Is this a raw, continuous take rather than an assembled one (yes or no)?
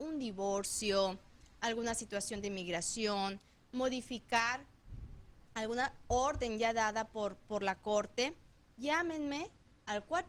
yes